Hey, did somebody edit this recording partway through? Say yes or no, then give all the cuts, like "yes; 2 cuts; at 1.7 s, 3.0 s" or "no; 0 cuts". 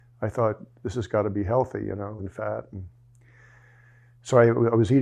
yes; 1 cut; at 2.2 s